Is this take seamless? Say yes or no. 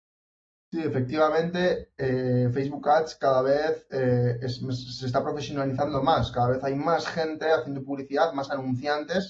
yes